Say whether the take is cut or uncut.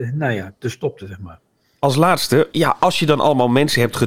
cut